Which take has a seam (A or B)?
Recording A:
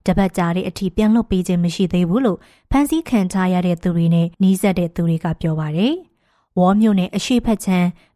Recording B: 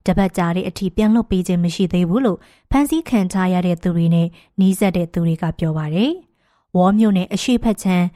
A